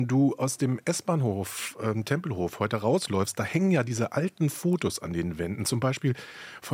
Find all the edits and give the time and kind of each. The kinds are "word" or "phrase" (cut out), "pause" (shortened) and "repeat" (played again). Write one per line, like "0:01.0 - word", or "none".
none